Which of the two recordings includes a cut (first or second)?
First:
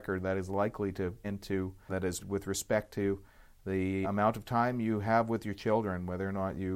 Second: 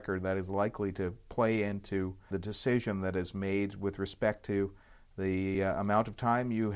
first